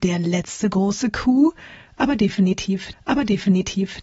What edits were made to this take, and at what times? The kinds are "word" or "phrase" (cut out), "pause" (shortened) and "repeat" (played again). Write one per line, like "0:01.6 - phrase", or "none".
0:02.9 - repeat

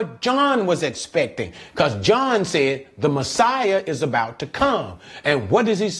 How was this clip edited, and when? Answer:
none

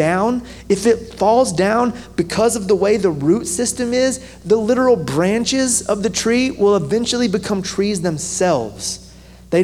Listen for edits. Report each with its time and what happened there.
none

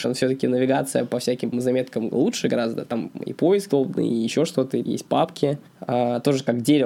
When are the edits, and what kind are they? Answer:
0:01.5 - word
0:03.7 - word
0:04.9 - word
0:05.7 - pause

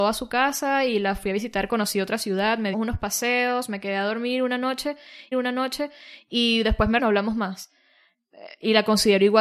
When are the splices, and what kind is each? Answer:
0:02.7 - phrase
0:05.3 - repeat
0:07.0 - phrase

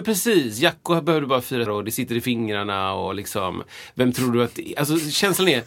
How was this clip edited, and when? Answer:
0:01.7 - word

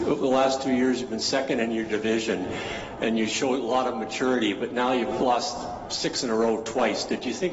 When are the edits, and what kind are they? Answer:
none

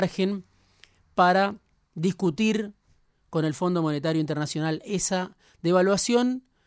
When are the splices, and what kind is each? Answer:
none

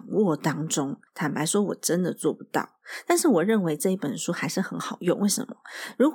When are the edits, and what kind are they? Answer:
0:01.1 - pause

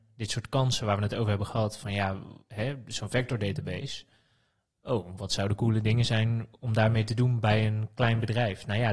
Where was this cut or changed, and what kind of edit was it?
none

